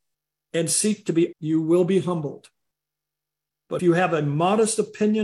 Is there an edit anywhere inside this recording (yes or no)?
yes